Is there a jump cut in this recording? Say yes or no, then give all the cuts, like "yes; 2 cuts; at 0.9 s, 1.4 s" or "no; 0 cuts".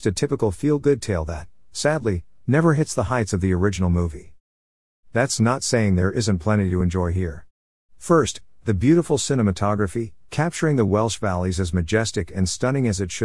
no; 0 cuts